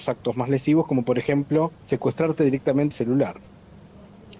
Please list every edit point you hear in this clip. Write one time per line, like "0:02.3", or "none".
0:01.7
0:02.9